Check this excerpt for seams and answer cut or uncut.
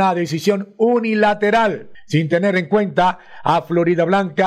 uncut